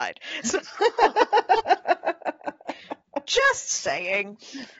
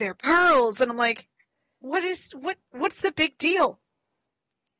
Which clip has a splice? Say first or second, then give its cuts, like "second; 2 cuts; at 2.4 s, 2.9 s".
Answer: second; 1 cut; at 2.7 s